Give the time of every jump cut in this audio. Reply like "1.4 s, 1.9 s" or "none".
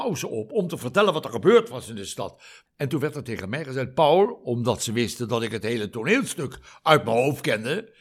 none